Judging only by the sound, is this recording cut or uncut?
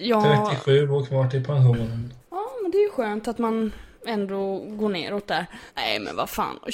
cut